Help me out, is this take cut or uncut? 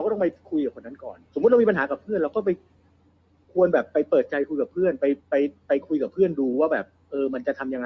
cut